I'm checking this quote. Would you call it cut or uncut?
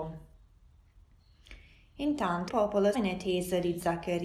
cut